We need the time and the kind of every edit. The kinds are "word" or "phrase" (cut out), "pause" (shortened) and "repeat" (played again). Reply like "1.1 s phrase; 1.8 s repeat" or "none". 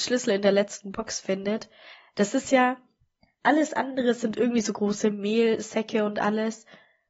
none